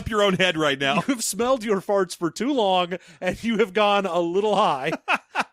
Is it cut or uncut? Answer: uncut